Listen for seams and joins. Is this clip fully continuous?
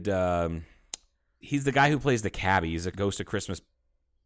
no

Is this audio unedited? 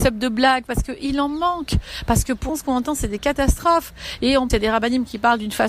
no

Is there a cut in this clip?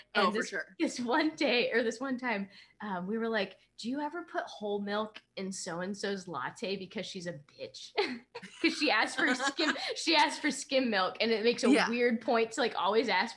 no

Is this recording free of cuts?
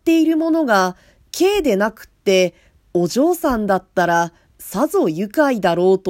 yes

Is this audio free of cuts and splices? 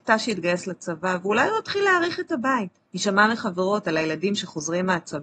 no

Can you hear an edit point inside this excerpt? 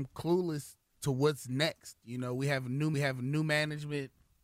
yes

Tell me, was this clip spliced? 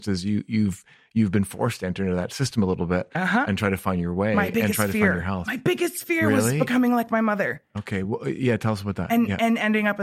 no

